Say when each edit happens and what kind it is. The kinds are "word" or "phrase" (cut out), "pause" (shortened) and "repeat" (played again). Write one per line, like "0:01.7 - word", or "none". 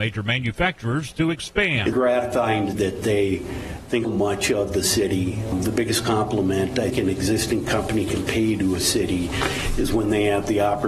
0:01.9 - word
0:02.7 - word
0:04.0 - word
0:06.9 - word